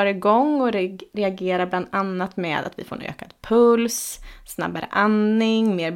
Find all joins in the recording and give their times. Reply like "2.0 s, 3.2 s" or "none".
none